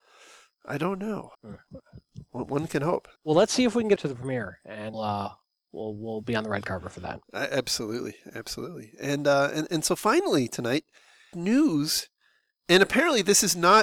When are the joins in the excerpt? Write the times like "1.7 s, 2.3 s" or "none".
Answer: 1.3 s, 3.2 s, 4.0 s, 4.9 s, 7.2 s, 11.3 s